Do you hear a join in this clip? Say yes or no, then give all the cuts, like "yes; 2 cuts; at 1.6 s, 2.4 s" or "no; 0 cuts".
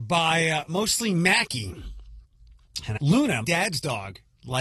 yes; 2 cuts; at 3.0 s, 3.4 s